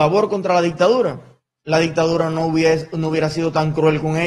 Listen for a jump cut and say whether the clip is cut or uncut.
uncut